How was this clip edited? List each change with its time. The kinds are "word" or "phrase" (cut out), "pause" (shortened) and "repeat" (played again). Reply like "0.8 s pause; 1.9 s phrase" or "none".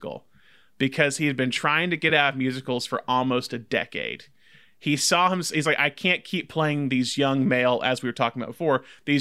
none